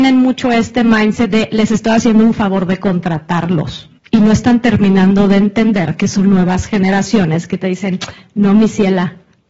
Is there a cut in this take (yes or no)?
yes